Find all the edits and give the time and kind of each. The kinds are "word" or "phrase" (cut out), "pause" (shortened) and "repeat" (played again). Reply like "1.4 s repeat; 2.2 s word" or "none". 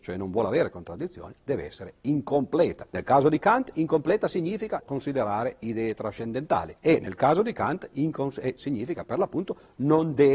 1.4 s word; 2.9 s pause; 4.8 s phrase; 6.8 s pause; 8.6 s word